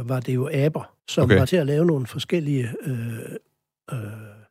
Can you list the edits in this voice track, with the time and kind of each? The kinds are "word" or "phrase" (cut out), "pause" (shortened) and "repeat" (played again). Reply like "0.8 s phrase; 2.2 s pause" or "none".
1.0 s pause; 1.5 s word

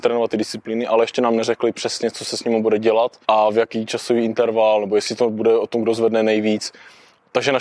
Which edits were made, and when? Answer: 3.2 s pause

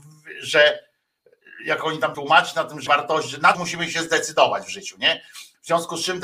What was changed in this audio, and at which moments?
2.1 s word; 2.9 s word; 3.5 s word

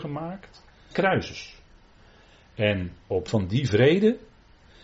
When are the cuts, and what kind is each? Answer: 0.9 s phrase; 3.3 s word

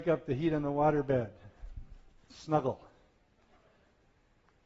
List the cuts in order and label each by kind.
2.3 s word

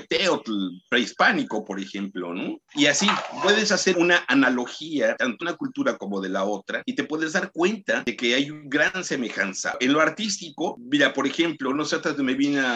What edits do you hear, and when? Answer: 3.9 s word; 5.4 s word

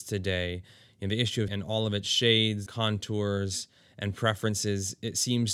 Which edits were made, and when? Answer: 1.5 s word; 2.7 s word

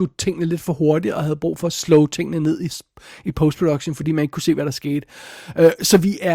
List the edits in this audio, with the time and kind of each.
none

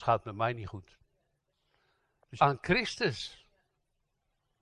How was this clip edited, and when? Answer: 2.4 s phrase

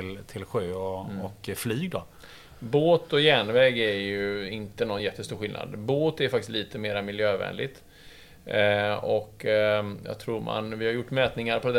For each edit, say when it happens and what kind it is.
none

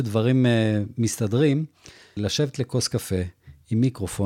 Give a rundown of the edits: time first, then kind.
none

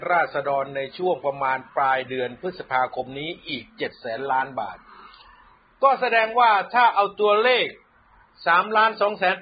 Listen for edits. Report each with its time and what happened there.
none

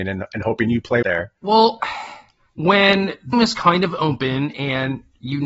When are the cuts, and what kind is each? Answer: 1.0 s phrase; 1.4 s pause; 3.3 s word

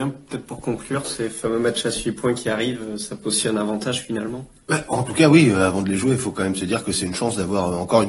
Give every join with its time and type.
3.2 s word

